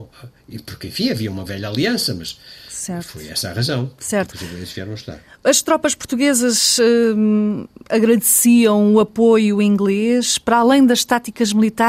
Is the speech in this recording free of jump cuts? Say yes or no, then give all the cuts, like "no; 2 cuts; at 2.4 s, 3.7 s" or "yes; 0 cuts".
yes; 0 cuts